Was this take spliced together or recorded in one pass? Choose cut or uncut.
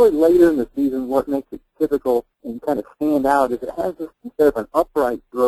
cut